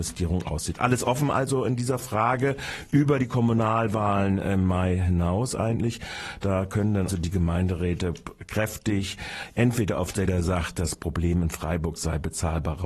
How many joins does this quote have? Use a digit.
2